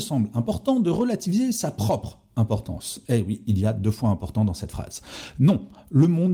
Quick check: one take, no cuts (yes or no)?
yes